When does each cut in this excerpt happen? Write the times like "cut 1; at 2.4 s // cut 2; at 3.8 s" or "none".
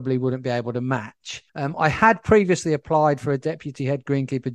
cut 1; at 1.5 s